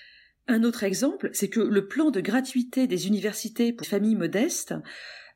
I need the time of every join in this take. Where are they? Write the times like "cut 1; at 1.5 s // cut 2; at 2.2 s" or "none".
cut 1; at 3.8 s